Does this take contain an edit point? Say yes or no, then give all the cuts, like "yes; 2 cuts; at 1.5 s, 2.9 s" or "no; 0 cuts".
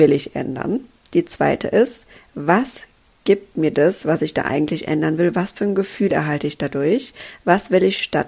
no; 0 cuts